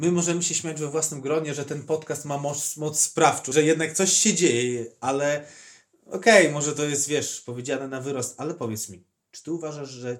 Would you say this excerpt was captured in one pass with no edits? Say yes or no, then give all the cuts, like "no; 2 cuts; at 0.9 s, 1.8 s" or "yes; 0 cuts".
no; 1 cut; at 3.5 s